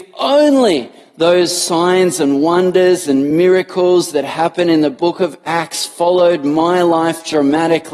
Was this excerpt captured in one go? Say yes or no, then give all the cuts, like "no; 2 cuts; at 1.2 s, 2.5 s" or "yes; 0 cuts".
yes; 0 cuts